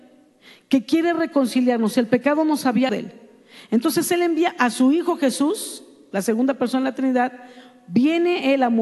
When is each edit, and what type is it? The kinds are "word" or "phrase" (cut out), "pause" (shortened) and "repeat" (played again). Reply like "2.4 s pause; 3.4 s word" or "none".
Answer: 2.9 s word